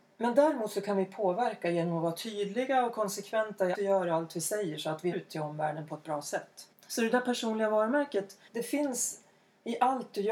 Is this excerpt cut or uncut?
cut